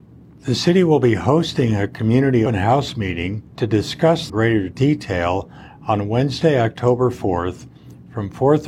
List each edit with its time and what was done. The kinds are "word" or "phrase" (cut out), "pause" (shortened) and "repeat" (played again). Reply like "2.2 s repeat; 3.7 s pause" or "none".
2.5 s word; 3.5 s pause; 4.3 s phrase

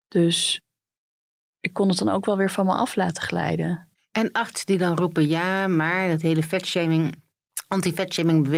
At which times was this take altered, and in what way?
3.9 s pause

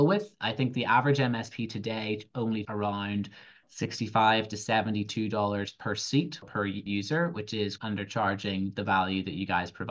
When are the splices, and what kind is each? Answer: 2.6 s word; 6.4 s word; 6.9 s word; 7.8 s word

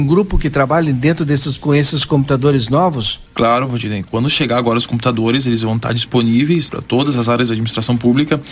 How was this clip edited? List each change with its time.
1.6 s word; 3.3 s pause; 6.7 s word

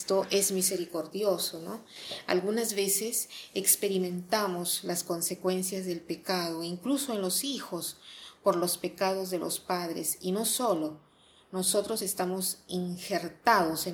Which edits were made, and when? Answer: none

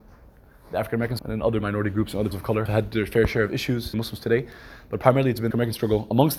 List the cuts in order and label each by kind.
1.2 s word; 2.3 s word; 2.7 s word; 3.9 s word; 5.5 s word

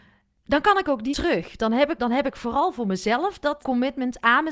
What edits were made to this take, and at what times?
1.1 s word; 2.0 s word; 3.6 s word

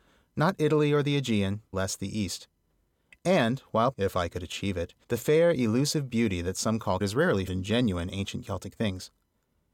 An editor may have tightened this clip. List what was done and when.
1.7 s word; 3.9 s word; 5.0 s pause; 7.0 s phrase; 7.5 s word

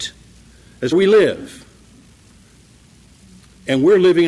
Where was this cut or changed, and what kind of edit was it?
0.9 s word

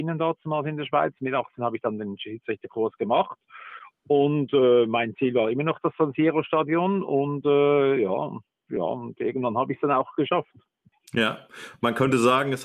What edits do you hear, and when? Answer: none

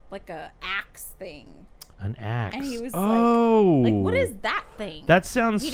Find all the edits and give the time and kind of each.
1.9 s pause

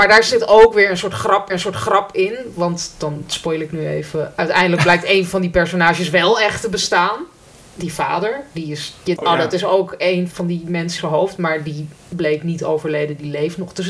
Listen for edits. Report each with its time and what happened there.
1.5 s repeat; 9.2 s word; 10.3 s word; 11.0 s word

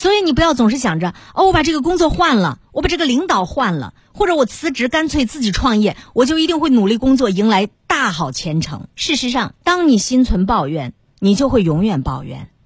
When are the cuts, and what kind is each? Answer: 8.9 s pause; 9.6 s pause

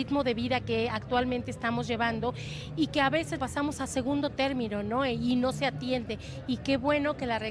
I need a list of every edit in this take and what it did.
3.4 s word

